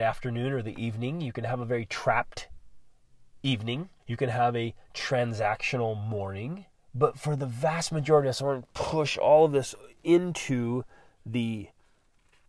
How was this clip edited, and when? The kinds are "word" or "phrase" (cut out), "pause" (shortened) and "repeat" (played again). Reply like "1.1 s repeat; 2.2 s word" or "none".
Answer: 4.0 s pause; 6.7 s pause

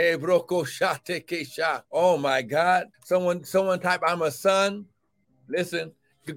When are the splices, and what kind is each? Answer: 1.8 s pause; 2.9 s pause; 5.2 s pause

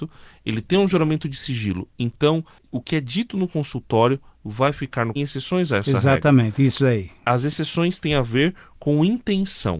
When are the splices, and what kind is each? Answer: 5.2 s phrase

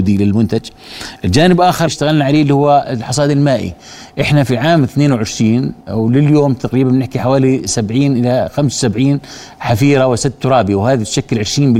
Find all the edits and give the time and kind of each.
1.9 s word; 5.8 s pause

